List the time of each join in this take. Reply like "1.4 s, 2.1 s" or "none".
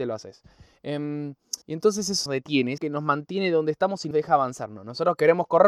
1.6 s, 2.3 s, 2.8 s, 4.1 s